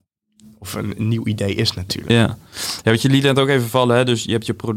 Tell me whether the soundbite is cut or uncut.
uncut